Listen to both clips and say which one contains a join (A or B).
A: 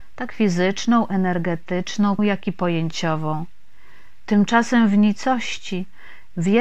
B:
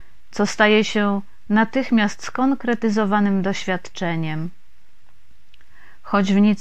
A